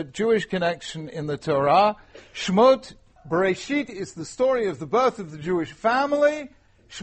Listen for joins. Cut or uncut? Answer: cut